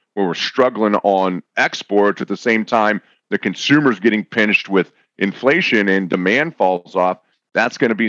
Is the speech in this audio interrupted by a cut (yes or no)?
no